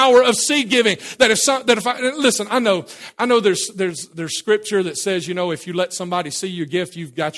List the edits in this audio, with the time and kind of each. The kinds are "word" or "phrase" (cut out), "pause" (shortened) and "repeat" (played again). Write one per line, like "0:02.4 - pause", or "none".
none